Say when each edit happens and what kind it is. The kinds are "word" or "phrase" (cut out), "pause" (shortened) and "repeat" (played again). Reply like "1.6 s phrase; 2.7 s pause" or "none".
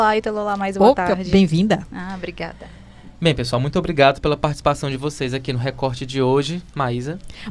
none